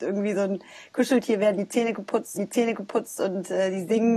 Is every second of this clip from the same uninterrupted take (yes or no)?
no